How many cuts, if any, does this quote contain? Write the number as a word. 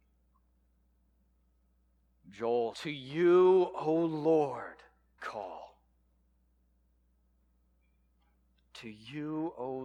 two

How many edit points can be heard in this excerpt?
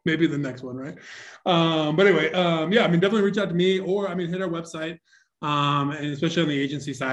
zero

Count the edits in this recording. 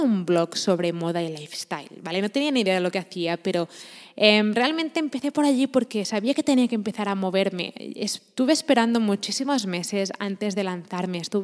zero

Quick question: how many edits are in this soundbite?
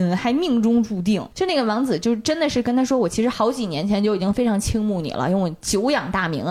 one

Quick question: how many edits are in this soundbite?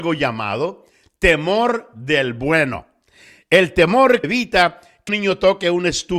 two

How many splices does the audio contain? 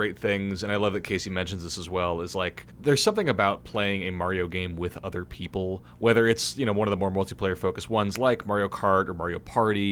one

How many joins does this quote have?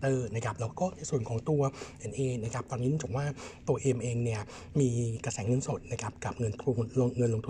one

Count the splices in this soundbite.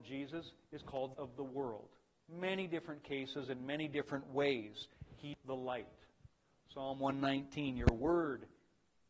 two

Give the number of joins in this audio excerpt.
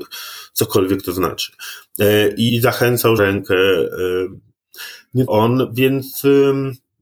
three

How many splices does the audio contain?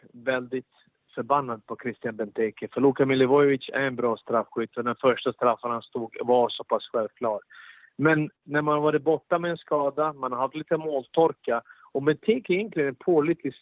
zero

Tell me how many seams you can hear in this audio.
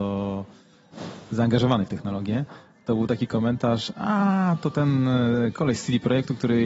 zero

